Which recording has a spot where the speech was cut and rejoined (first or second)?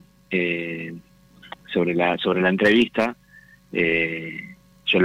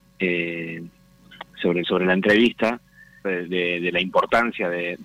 second